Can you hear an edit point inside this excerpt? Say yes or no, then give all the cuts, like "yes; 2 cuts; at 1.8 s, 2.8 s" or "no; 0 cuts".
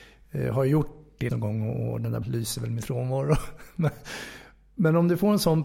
yes; 3 cuts; at 1.3 s, 2.2 s, 2.8 s